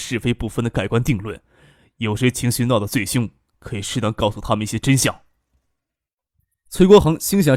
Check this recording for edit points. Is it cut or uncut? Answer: uncut